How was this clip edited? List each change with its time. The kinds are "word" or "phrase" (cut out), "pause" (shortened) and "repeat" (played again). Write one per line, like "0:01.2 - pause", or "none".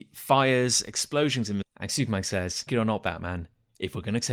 0:01.6 - word
0:02.7 - word